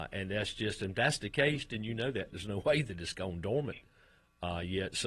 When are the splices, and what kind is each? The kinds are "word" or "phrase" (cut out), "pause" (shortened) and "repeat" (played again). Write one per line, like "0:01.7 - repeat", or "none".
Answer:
0:02.3 - word